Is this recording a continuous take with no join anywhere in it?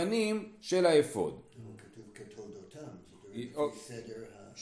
yes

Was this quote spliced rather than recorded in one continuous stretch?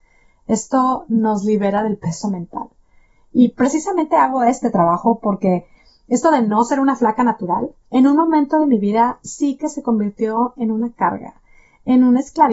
no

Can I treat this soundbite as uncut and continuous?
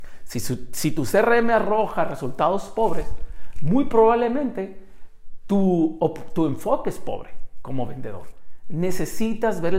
yes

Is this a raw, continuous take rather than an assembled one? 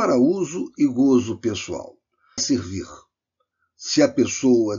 no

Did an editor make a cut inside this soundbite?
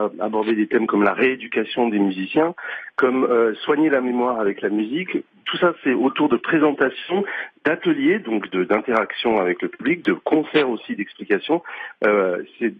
no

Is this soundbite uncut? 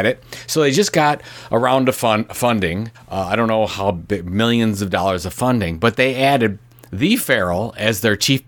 no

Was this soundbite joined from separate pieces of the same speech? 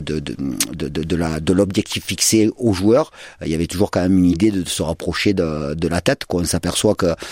no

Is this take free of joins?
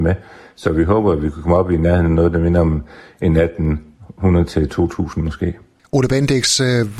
yes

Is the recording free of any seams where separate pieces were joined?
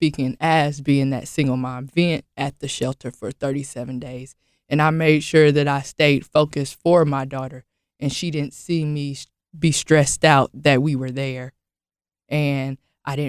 yes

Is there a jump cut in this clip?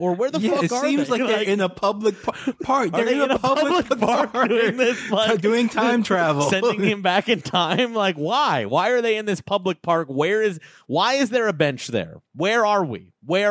no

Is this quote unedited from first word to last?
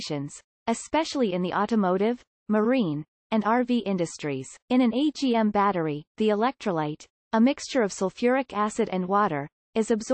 no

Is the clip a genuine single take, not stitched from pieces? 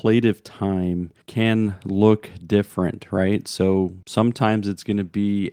no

